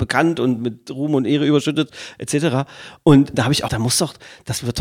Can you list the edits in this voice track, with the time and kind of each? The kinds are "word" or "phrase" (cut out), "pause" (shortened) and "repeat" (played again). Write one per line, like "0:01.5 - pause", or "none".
0:03.3 - word
0:03.7 - word